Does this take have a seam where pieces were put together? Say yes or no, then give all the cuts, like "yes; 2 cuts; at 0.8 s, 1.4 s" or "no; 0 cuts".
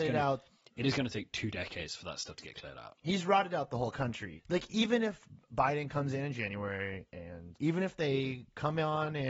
no; 0 cuts